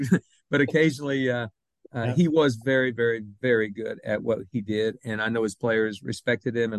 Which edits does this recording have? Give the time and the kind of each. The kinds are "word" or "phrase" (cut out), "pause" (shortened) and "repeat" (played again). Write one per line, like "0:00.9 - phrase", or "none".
none